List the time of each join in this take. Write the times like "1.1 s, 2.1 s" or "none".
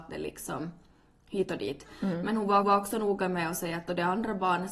2.6 s